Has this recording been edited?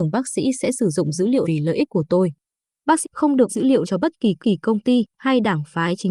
yes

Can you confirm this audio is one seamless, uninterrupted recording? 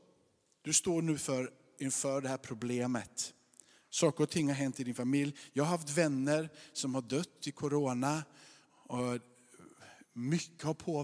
yes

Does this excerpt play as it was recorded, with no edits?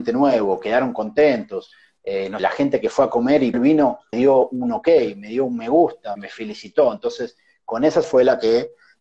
no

